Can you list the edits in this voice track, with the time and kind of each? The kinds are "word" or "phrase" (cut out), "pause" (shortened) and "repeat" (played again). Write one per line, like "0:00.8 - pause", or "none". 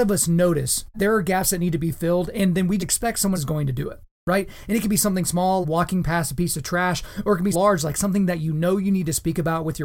0:00.9 - word
0:02.8 - word
0:03.3 - word
0:05.6 - word
0:07.5 - word